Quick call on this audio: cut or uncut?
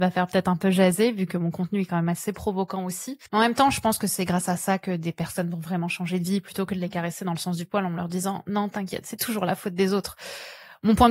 cut